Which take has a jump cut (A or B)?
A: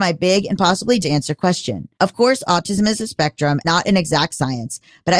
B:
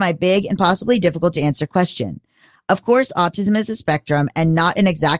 A